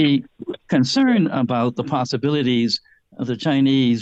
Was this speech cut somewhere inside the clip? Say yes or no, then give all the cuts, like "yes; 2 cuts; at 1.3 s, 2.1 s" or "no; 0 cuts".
no; 0 cuts